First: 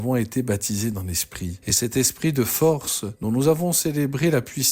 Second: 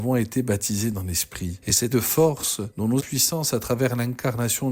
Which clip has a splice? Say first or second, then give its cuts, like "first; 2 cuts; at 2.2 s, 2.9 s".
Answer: second; 2 cuts; at 1.9 s, 3.0 s